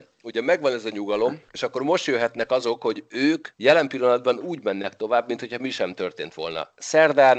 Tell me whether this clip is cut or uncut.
cut